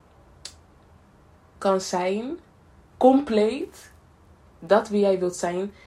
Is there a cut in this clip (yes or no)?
no